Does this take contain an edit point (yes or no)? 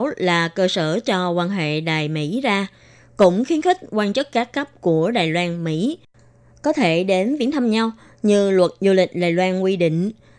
no